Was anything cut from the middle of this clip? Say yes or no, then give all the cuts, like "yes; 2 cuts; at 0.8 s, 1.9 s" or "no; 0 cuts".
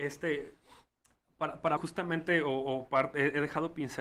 yes; 1 cut; at 1.8 s